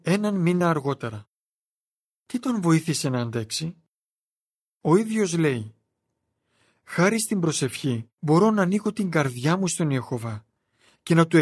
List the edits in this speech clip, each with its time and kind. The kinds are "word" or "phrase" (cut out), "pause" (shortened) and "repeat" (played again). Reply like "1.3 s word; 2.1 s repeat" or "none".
8.1 s pause